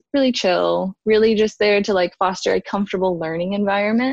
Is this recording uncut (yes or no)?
yes